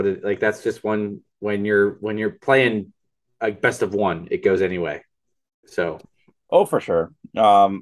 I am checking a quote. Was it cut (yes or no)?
no